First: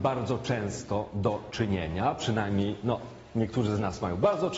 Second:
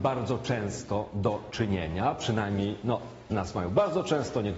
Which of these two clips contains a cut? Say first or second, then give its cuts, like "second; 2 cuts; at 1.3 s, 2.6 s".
second; 1 cut; at 3.3 s